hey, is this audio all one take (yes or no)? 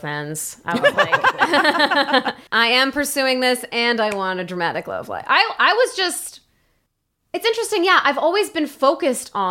no